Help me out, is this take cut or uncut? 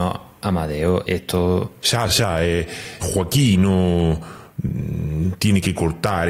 cut